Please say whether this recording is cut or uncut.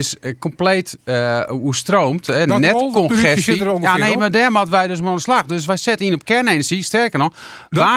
uncut